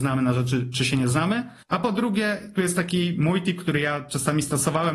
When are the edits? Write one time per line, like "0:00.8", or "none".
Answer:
0:01.6